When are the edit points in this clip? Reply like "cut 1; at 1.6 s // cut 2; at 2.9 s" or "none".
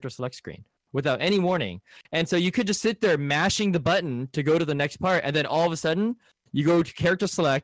none